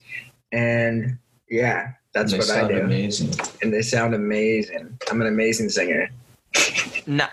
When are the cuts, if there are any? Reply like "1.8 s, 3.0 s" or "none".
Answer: none